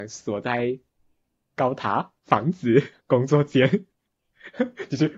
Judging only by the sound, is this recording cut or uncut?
cut